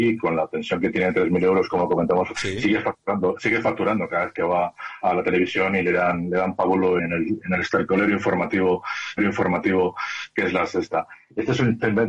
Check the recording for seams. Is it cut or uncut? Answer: cut